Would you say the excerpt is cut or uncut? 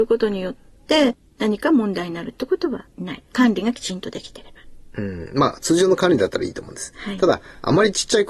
cut